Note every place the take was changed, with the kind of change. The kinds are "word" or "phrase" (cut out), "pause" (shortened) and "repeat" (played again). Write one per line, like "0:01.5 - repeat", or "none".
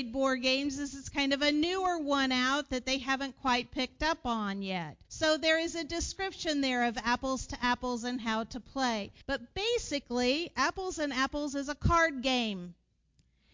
0:05.0 - pause
0:09.2 - pause